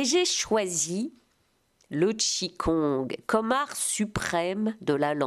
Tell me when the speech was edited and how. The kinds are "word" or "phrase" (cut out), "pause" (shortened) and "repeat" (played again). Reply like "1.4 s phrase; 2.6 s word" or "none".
none